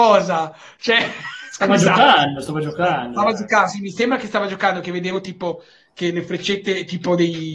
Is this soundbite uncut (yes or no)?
yes